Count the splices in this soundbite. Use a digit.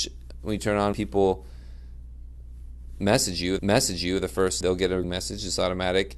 4